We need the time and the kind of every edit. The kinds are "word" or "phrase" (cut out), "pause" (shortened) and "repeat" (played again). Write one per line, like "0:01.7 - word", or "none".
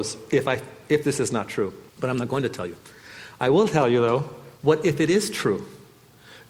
0:01.9 - pause
0:04.6 - pause

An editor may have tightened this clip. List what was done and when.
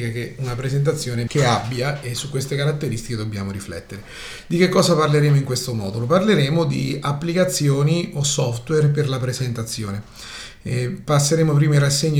0:01.3 - word

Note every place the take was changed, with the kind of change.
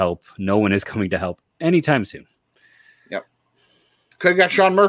none

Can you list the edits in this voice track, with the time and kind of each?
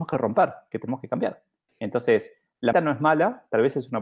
0:02.7 - word

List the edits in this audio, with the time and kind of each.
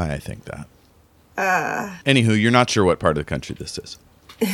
0:02.0 - pause

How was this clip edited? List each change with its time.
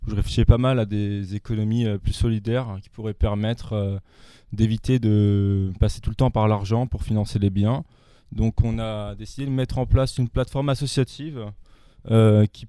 none

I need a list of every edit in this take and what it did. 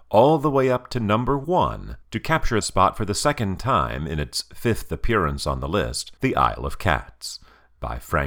0:02.0 - pause
0:02.6 - word
0:06.2 - pause

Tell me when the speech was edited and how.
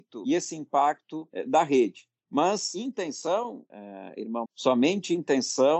0:03.7 - word
0:04.4 - word

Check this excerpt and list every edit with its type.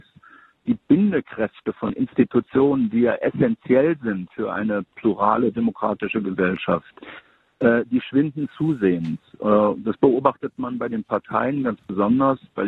none

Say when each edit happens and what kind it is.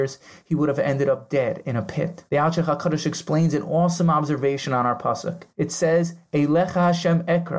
0:02.3 - pause
0:05.5 - pause

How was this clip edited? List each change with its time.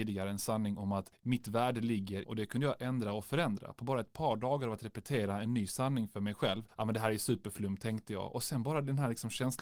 0:02.2 - phrase

